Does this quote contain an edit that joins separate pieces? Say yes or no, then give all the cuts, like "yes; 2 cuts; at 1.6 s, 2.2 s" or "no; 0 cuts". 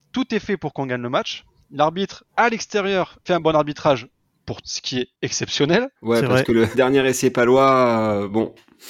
yes; 5 cuts; at 2.3 s, 3.3 s, 4.6 s, 6.0 s, 6.7 s